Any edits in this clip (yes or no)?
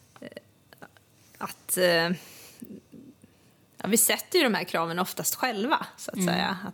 no